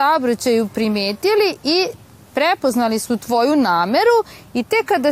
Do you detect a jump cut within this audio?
no; 0 cuts

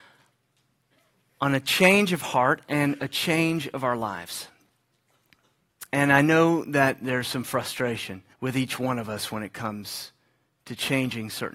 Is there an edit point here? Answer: yes; 1 cut; at 8.3 s

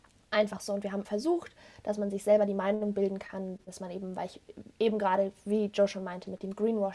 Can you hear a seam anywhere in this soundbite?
yes; 1 cut; at 1.0 s

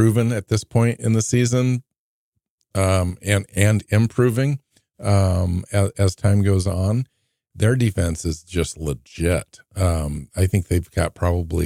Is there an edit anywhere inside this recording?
no; 0 cuts

